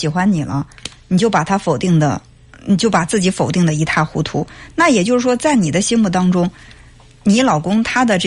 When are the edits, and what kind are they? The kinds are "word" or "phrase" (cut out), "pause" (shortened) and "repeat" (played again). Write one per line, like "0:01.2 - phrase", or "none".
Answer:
none